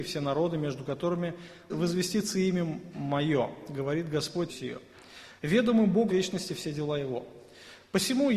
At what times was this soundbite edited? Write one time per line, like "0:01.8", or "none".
0:01.7
0:04.5
0:06.1

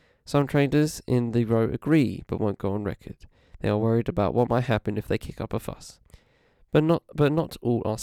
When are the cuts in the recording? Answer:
none

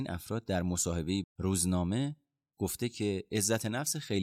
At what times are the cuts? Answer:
0:01.2

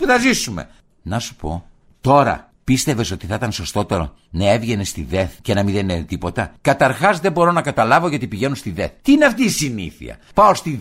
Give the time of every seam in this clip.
0:05.4

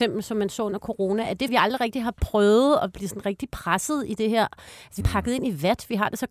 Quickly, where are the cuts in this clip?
0:01.5
0:05.0

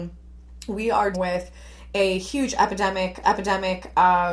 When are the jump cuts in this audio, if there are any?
0:01.1
0:03.2

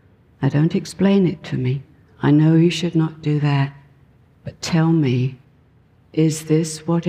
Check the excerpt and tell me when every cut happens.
none

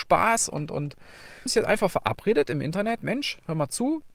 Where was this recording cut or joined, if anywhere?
0:01.5

